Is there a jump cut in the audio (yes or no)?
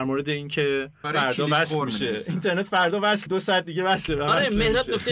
yes